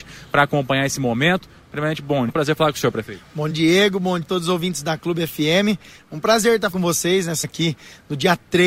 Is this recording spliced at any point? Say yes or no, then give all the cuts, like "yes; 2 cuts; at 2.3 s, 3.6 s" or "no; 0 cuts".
yes; 5 cuts; at 2.3 s, 3.5 s, 4.2 s, 6.7 s, 7.4 s